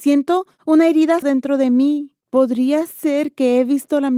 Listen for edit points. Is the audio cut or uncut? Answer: cut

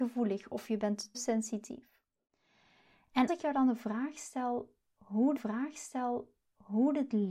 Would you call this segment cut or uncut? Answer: cut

